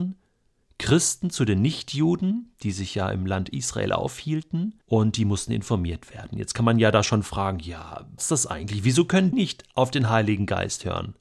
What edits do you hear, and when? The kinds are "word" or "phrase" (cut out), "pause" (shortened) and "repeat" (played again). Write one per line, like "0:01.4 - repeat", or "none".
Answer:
0:04.8 - pause
0:08.2 - word
0:09.3 - word